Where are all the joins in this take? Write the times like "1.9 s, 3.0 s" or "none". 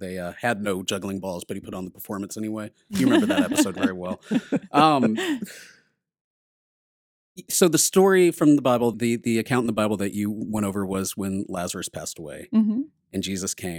8.9 s